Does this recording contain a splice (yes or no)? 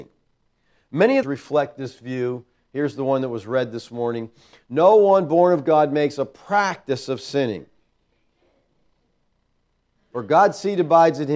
yes